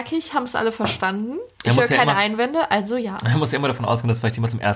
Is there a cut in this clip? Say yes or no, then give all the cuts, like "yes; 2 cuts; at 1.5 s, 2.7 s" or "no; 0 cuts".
yes; 1 cut; at 1.5 s